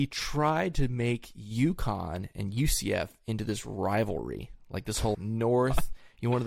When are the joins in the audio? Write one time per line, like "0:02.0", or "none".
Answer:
0:05.1